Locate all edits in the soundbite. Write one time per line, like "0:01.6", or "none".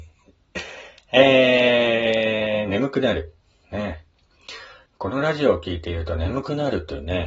0:04.8